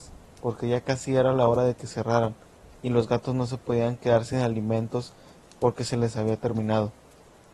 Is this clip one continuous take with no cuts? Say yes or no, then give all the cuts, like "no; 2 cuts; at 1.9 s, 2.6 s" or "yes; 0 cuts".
yes; 0 cuts